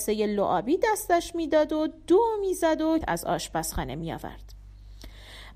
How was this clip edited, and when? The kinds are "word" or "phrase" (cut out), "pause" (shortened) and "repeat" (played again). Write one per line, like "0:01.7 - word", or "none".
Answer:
0:03.0 - word